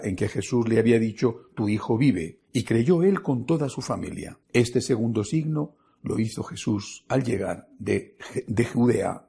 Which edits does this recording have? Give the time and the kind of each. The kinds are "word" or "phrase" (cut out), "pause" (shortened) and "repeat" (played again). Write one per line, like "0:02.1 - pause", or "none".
0:02.4 - pause
0:04.4 - pause